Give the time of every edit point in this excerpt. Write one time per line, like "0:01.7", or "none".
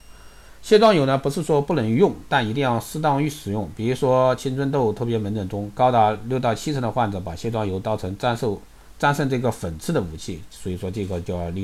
none